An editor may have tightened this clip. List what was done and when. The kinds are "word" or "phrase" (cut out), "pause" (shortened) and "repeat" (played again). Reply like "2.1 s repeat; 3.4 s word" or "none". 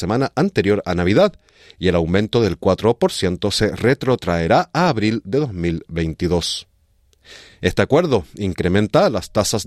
none